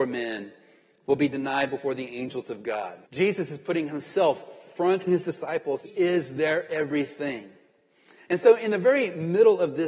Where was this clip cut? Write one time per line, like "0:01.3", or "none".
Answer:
0:03.0
0:05.1
0:05.8